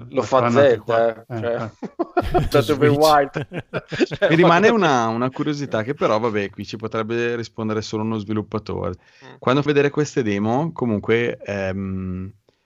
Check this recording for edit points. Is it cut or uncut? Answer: cut